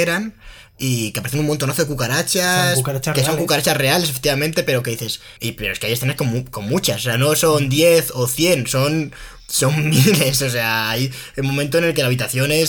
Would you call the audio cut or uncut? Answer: cut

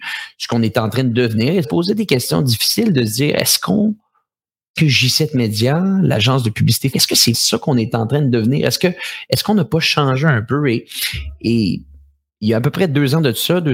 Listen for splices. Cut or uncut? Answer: cut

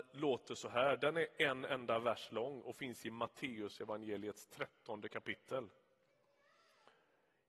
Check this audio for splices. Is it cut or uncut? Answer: uncut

